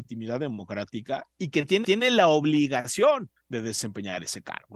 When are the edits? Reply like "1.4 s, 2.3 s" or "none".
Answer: 1.8 s, 3.4 s